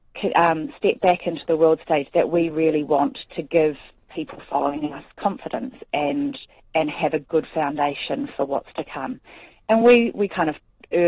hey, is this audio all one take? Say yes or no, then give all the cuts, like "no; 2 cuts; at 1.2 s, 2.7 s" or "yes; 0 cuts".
yes; 0 cuts